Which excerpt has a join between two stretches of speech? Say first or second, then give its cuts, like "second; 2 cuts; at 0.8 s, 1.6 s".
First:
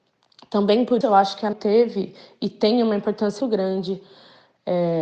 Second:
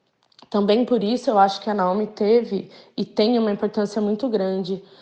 first; 3 cuts; at 1.0 s, 1.5 s, 3.4 s